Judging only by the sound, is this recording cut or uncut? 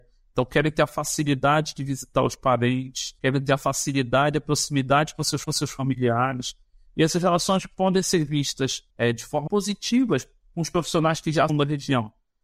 cut